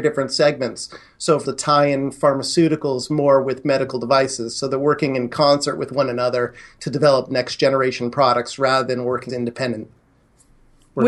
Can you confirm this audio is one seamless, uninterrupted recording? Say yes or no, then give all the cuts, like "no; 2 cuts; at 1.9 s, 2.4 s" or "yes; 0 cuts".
no; 2 cuts; at 1.4 s, 9.3 s